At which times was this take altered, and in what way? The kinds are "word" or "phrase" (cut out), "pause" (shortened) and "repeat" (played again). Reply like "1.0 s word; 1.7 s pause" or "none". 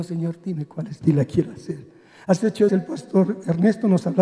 1.0 s word; 2.7 s word